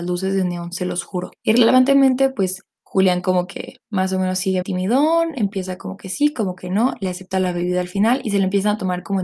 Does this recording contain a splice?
yes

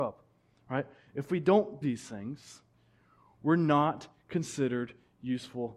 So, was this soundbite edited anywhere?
yes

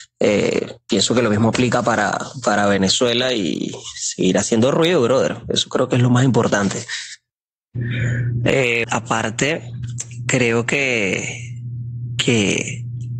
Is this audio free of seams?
no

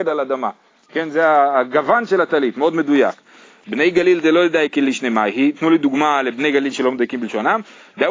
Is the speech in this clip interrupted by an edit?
no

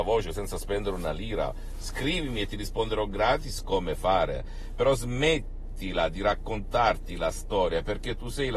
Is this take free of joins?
yes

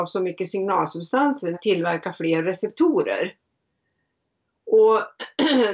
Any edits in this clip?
yes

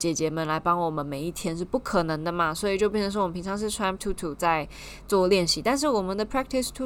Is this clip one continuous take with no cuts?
no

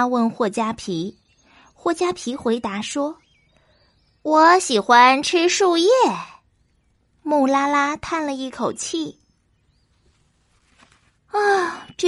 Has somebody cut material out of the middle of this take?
no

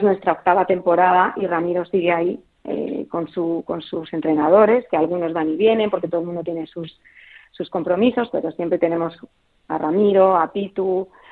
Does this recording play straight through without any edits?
no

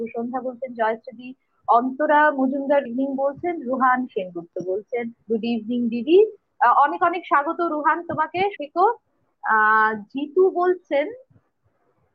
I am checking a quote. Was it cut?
yes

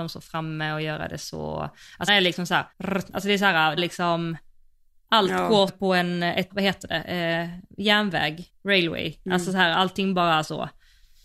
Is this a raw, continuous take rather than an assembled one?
no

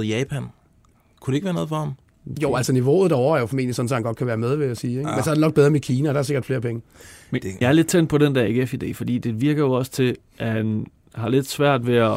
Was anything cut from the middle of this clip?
yes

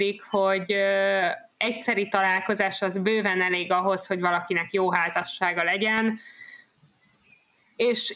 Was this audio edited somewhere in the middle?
no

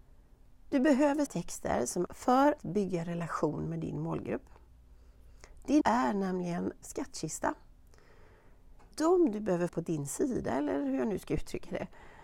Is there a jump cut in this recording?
yes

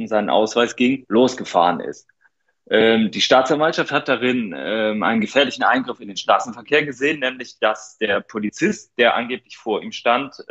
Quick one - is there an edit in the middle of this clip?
no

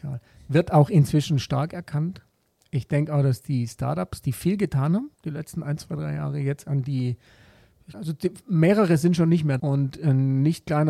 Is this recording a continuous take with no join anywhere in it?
no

